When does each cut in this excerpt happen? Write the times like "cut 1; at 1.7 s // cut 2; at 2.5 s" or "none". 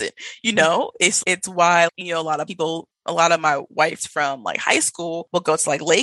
cut 1; at 1.2 s // cut 2; at 1.9 s // cut 3; at 2.5 s // cut 4; at 4.0 s